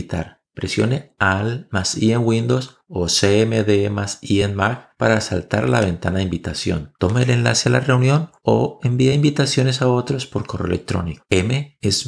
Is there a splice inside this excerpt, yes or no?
no